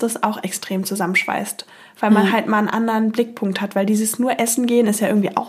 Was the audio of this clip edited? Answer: no; 0 cuts

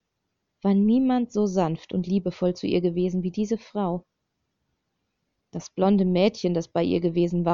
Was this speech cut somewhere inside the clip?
no; 0 cuts

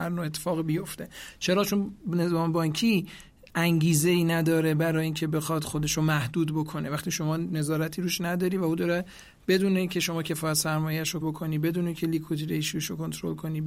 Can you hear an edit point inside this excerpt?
yes; 1 cut; at 11.2 s

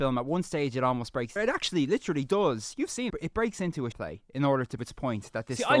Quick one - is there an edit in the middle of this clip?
yes; 4 cuts; at 1.4 s, 3.1 s, 3.9 s, 4.8 s

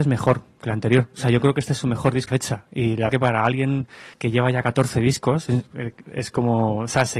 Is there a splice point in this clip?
yes; 3 cuts; at 2.3 s, 3.1 s, 4.1 s

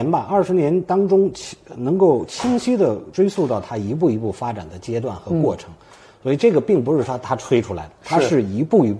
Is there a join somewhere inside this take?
no; 0 cuts

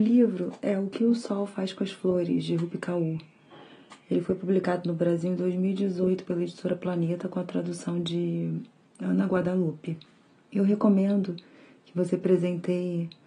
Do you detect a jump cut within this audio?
no; 0 cuts

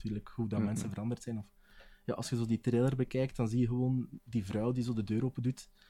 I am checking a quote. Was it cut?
no; 0 cuts

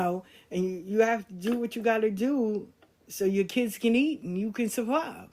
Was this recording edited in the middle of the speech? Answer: no; 0 cuts

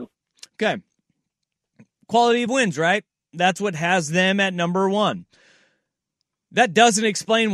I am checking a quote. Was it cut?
no; 0 cuts

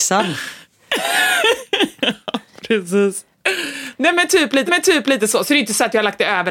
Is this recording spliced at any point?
yes; 1 cut; at 4.7 s

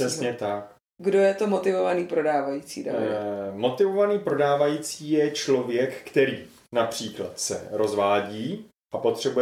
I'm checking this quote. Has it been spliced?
no; 0 cuts

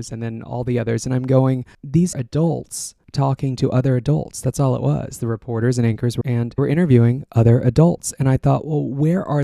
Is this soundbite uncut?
no; 3 cuts; at 2.1 s, 6.2 s, 6.6 s

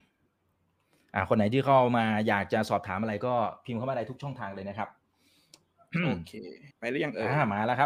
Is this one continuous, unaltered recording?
no; 1 cut; at 6.7 s

